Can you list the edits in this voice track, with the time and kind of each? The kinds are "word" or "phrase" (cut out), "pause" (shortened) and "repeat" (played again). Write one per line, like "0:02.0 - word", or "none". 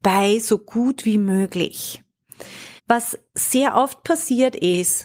0:02.8 - pause